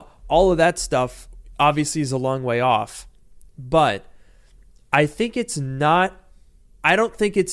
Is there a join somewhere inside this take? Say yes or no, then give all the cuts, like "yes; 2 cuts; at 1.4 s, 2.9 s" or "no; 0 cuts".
no; 0 cuts